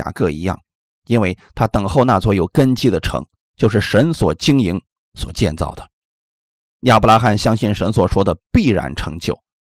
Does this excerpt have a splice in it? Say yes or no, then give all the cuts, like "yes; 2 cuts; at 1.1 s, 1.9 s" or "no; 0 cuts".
no; 0 cuts